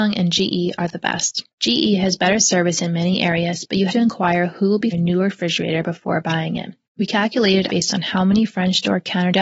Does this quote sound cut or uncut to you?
cut